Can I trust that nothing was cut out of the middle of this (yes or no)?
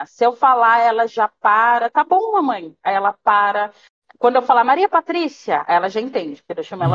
yes